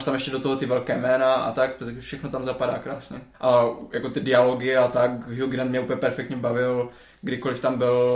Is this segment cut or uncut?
cut